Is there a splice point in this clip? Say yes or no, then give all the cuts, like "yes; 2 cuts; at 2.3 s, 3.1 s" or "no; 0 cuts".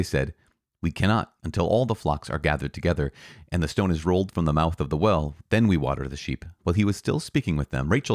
yes; 2 cuts; at 1.4 s, 6.6 s